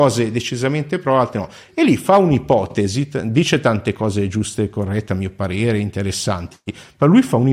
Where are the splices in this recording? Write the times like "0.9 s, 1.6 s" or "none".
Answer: none

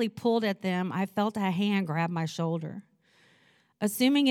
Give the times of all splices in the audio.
none

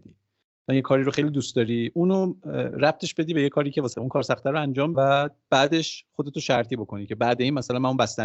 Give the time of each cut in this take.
3.9 s, 4.9 s

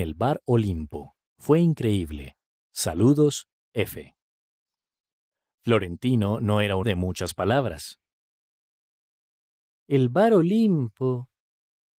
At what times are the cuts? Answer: 1.3 s, 6.8 s

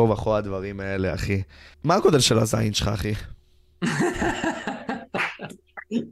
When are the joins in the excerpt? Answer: 1.7 s

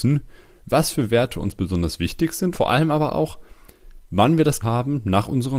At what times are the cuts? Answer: 2.5 s, 4.6 s

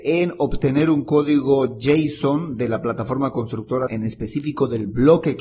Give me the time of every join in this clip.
3.9 s

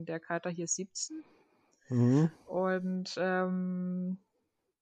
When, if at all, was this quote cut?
none

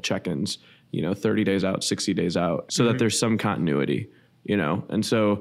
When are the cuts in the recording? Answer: 2.7 s

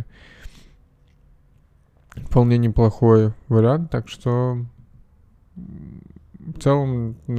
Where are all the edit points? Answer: none

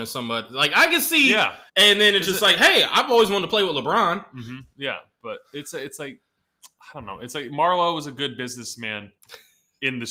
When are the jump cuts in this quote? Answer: 1.7 s, 9.2 s

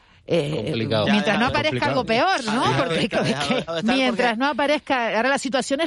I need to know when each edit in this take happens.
1.0 s, 3.1 s, 3.7 s

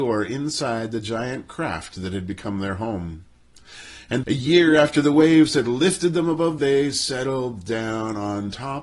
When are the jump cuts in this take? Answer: 4.2 s, 6.6 s

